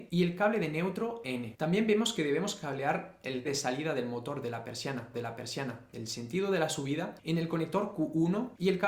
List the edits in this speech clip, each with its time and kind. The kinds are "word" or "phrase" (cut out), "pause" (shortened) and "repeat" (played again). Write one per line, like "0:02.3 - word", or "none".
0:01.2 - phrase
0:03.4 - word
0:05.1 - repeat